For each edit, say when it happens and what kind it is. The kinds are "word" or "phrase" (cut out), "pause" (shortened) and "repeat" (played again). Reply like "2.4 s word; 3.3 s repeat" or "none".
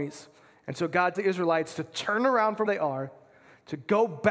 1.1 s word; 2.7 s word